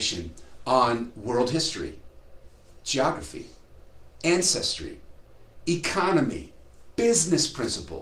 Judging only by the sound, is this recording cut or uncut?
uncut